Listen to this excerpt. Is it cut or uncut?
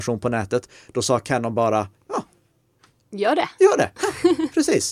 uncut